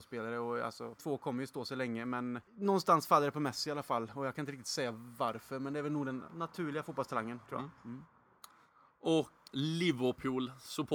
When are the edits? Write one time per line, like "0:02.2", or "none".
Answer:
0:01.0
0:02.5
0:06.3
0:07.4
0:09.5